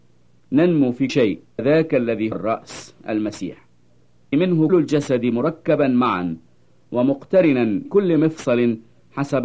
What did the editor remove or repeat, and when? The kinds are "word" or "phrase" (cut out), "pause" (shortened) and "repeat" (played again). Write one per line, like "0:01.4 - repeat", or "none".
0:01.1 - word
0:01.6 - word
0:02.3 - word
0:04.3 - word
0:04.7 - word
0:07.9 - word